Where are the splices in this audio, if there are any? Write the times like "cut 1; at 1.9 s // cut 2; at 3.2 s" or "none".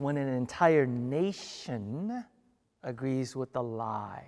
cut 1; at 2.6 s